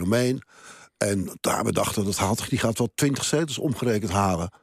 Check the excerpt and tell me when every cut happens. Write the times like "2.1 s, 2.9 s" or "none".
none